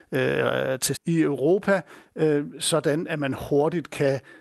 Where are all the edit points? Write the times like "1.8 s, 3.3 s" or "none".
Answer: 0.9 s